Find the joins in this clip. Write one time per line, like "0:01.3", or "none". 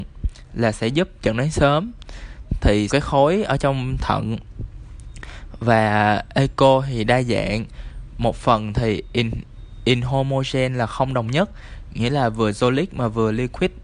0:02.9